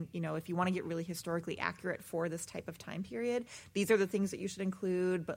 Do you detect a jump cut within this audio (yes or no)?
no